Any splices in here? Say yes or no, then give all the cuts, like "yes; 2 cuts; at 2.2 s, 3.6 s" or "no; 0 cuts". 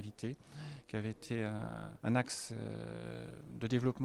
yes; 1 cut; at 2.0 s